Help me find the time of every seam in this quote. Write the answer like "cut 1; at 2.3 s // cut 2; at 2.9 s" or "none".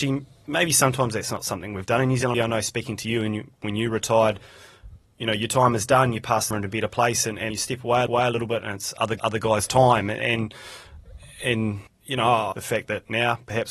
cut 1; at 2.3 s // cut 2; at 6.5 s // cut 3; at 7.5 s // cut 4; at 8.1 s // cut 5; at 9.2 s // cut 6; at 11.9 s // cut 7; at 12.5 s